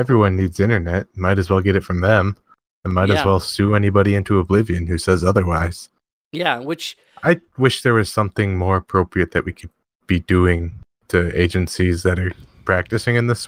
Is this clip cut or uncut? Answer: uncut